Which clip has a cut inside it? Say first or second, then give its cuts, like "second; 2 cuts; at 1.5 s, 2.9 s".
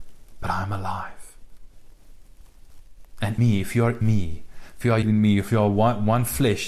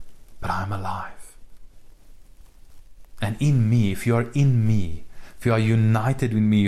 first; 3 cuts; at 3.4 s, 4.0 s, 5.0 s